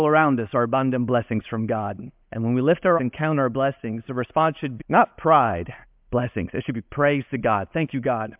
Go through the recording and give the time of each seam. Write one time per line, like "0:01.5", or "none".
0:02.2
0:03.0
0:04.8
0:05.8